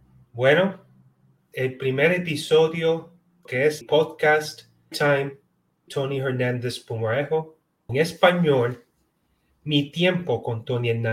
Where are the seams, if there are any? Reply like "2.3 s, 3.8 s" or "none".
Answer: 1.5 s, 3.5 s, 3.8 s, 4.9 s, 5.9 s, 7.9 s

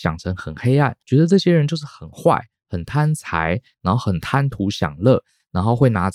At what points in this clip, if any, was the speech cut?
1.0 s

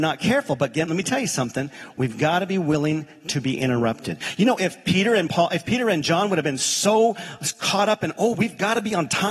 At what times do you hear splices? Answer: none

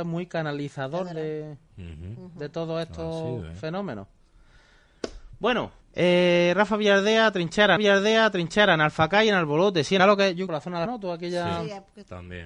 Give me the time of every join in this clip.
1.7 s, 5.8 s, 7.8 s, 10.0 s, 10.5 s, 10.9 s

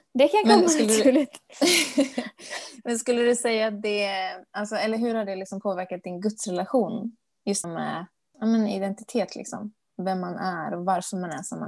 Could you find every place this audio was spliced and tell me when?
7.6 s

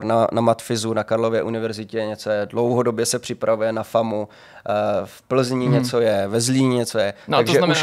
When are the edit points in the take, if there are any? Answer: none

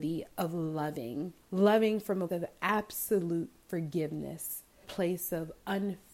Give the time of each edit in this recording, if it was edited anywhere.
1.4 s, 2.3 s, 4.8 s

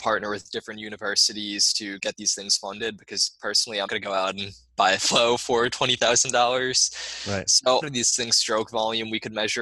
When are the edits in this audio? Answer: 3.9 s, 5.0 s, 7.8 s

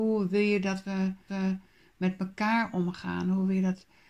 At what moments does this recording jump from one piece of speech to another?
1.3 s

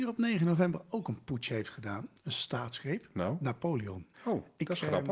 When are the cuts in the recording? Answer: 2.2 s, 4.1 s

